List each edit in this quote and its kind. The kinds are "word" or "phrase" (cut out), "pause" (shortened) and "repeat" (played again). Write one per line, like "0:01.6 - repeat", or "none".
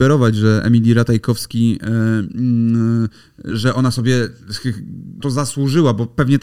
0:03.5 - word
0:05.2 - word